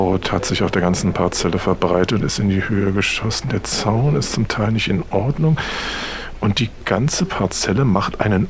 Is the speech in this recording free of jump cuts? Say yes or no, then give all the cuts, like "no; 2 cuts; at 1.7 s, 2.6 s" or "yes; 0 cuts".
no; 1 cut; at 2.2 s